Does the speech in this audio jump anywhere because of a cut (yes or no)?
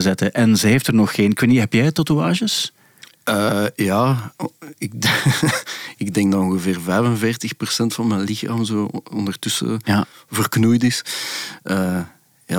no